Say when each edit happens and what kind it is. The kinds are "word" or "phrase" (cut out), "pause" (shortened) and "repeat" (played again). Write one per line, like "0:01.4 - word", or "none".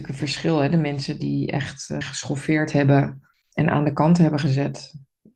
0:02.0 - word
0:03.3 - pause